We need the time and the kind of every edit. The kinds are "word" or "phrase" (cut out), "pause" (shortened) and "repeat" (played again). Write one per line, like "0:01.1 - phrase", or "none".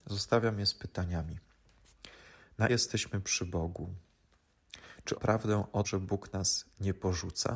0:02.7 - word
0:05.1 - word
0:05.8 - word